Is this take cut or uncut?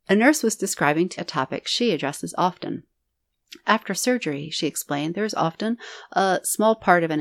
cut